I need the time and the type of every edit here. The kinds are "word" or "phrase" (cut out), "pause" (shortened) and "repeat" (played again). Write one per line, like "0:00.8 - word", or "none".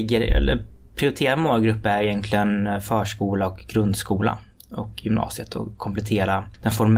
none